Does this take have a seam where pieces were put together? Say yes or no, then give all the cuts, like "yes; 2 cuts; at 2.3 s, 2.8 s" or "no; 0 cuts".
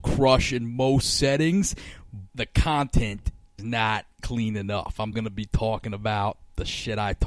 yes; 3 cuts; at 2.3 s, 3.6 s, 5.1 s